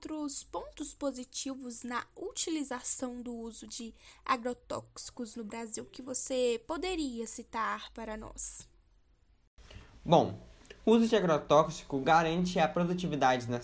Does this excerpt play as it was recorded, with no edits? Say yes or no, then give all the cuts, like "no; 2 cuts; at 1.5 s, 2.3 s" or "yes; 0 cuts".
yes; 0 cuts